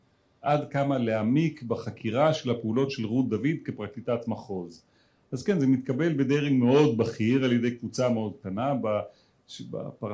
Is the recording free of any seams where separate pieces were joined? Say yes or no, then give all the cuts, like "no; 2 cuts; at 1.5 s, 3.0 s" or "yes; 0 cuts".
yes; 0 cuts